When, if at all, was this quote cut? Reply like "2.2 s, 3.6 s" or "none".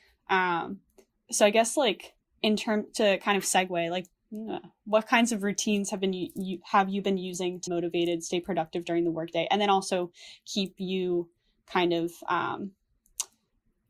7.7 s

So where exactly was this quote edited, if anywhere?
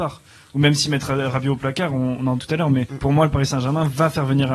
2.4 s, 2.9 s

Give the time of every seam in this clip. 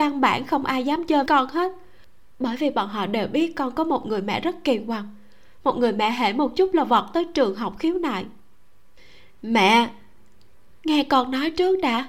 1.3 s

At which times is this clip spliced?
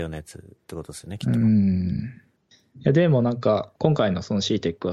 2.4 s, 3.7 s

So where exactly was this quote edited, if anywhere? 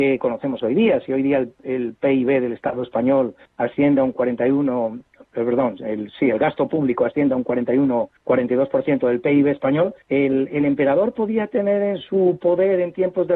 3.4 s, 8.2 s, 10.0 s

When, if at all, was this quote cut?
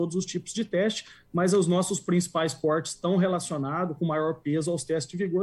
none

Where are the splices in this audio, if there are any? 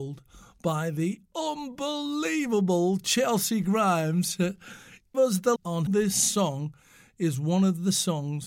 5.1 s, 5.6 s, 5.9 s

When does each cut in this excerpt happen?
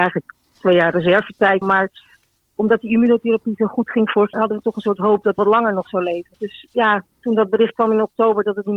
1.6 s, 4.3 s, 5.4 s, 6.3 s

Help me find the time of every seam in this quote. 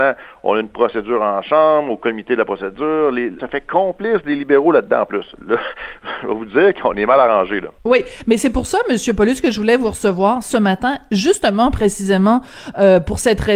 3.4 s, 7.8 s

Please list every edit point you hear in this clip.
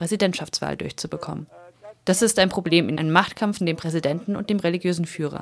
3.0 s, 3.6 s

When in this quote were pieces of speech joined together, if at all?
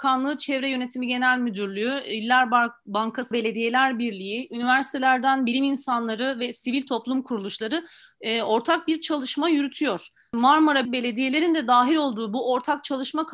3.3 s, 10.8 s

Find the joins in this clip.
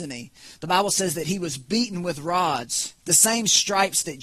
3.0 s

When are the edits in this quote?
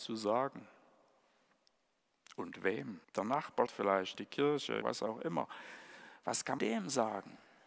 3.0 s, 3.7 s, 4.1 s, 4.8 s, 6.6 s

